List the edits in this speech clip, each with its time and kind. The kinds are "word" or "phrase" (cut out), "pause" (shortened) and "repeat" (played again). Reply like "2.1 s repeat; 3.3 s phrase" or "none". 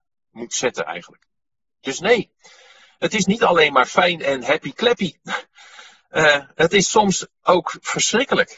none